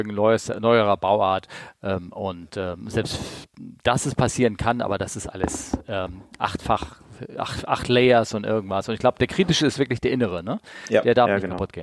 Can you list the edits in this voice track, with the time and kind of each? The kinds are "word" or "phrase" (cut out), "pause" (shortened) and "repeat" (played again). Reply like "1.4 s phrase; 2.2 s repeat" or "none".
none